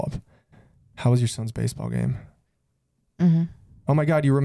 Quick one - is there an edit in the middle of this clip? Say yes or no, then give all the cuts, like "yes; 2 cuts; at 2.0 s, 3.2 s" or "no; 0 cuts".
no; 0 cuts